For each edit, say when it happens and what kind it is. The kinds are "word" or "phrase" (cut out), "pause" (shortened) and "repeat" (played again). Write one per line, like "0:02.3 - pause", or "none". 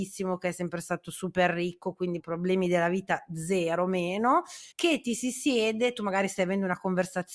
0:02.2 - word
0:04.7 - pause